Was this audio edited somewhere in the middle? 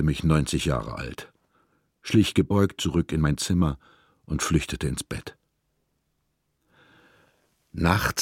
no; 0 cuts

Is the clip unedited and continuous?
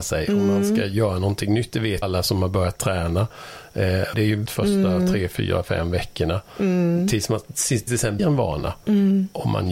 no; 5 cuts; at 2.0 s, 4.1 s, 4.5 s, 7.9 s, 8.2 s

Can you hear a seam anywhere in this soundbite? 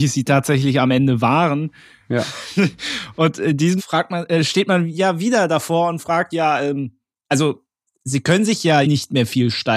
yes; 3 cuts; at 3.8 s, 6.3 s, 8.8 s

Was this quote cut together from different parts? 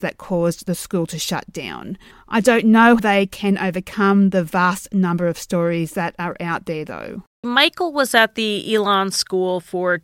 yes; 2 cuts; at 2.1 s, 3.0 s

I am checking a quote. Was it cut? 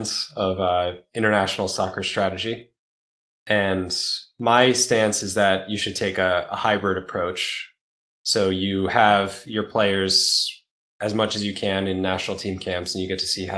no; 0 cuts

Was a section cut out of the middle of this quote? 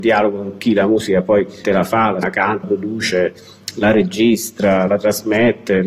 yes; 4 cuts; at 1.6 s, 2.2 s, 2.6 s, 4.9 s

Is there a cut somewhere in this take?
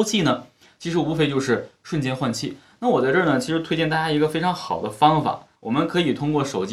yes; 1 cut; at 5.6 s

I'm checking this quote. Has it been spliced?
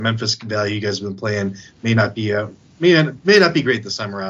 no; 0 cuts

